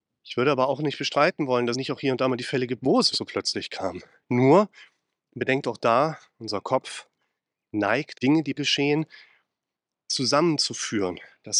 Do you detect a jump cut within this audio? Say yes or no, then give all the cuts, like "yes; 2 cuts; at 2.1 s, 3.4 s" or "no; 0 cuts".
yes; 4 cuts; at 1.7 s, 3.1 s, 8.1 s, 8.6 s